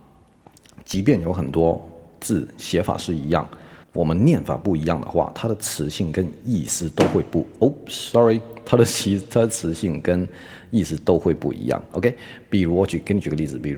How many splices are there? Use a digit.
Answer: 1